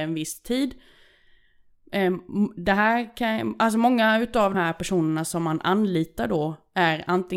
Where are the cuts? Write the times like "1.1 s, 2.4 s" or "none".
4.5 s